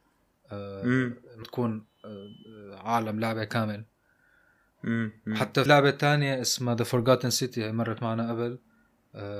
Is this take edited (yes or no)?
yes